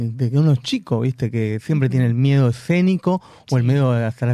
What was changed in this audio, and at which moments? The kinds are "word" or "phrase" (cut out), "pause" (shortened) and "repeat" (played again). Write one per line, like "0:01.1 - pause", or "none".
none